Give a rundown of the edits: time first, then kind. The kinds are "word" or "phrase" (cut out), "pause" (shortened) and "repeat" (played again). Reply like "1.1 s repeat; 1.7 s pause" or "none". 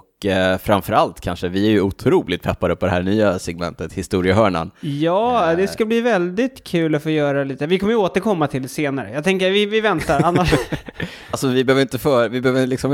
11.3 s word